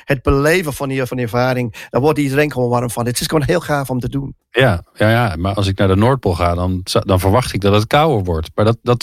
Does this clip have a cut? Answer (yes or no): yes